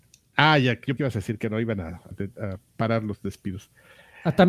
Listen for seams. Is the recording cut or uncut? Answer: cut